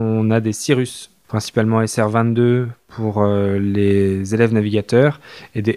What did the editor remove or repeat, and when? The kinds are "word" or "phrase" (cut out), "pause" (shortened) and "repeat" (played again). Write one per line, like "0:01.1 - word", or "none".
none